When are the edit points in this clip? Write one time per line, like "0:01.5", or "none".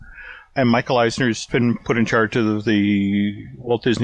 0:01.5